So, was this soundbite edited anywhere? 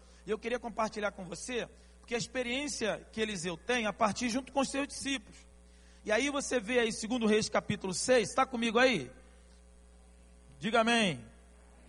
no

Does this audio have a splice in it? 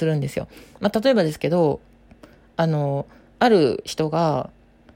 no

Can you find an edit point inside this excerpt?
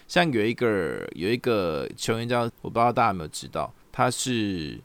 yes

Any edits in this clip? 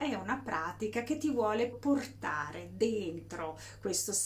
yes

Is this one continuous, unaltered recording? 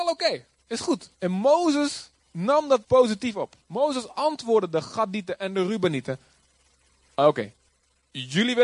no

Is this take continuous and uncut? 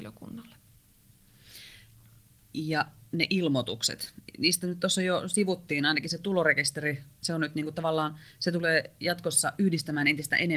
yes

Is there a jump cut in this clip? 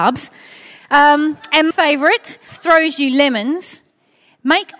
yes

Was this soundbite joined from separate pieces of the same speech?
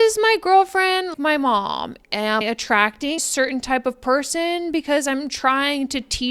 yes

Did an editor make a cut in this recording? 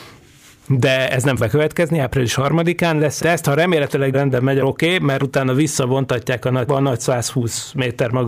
yes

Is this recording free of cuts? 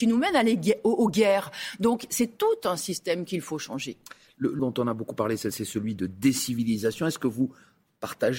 no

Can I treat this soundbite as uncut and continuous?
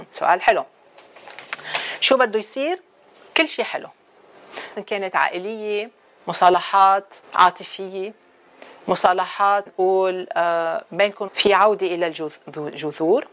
no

